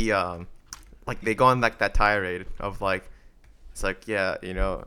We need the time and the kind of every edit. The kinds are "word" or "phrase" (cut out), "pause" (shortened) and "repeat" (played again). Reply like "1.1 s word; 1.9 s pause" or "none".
1.2 s word